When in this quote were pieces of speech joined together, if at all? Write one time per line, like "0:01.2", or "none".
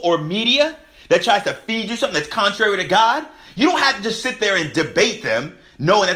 none